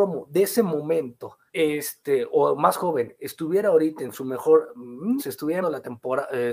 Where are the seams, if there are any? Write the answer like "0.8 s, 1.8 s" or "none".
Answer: 1.5 s, 5.2 s, 5.6 s